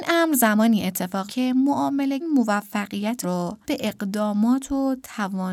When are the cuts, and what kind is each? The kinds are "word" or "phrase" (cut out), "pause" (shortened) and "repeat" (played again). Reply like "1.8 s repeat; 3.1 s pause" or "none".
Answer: 1.3 s word; 2.2 s word; 3.2 s word; 3.6 s word